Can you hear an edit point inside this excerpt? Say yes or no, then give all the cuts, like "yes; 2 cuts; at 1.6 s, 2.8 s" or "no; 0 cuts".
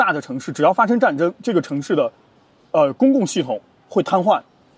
no; 0 cuts